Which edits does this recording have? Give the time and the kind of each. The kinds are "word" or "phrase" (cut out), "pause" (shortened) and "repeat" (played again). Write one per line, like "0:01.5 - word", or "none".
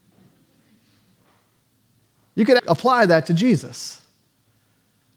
0:02.6 - word